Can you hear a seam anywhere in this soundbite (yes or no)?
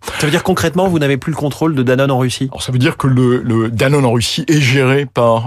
no